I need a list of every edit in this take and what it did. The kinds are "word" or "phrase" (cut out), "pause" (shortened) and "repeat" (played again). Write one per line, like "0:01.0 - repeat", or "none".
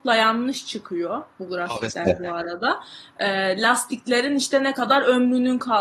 none

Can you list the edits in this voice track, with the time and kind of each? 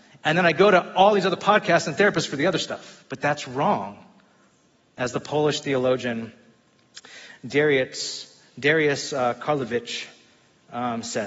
none

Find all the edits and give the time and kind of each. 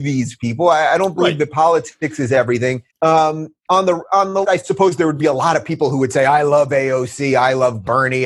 0:02.9 - pause
0:04.4 - word

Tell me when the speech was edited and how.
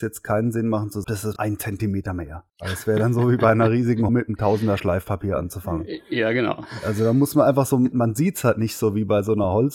0:01.0 - phrase
0:01.4 - word
0:02.5 - pause
0:04.1 - word
0:07.9 - word

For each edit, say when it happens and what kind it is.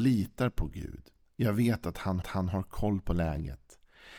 0:02.2 - repeat

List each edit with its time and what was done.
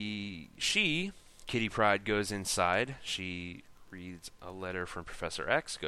none

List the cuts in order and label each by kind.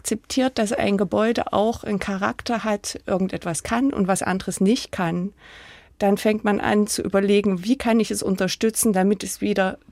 none

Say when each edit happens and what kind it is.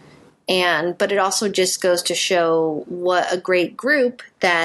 none

